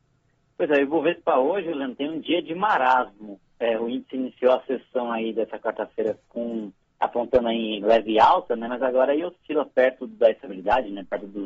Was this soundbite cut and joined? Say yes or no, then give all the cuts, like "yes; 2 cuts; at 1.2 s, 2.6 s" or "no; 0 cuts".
yes; 1 cut; at 6.8 s